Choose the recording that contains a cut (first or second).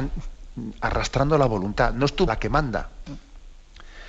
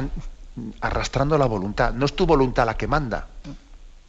first